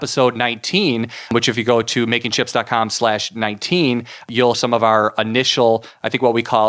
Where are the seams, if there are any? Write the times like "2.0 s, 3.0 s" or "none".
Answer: 4.5 s